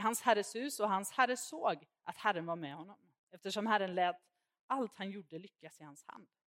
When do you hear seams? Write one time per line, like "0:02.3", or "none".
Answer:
none